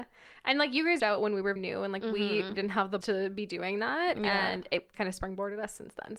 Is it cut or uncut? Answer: cut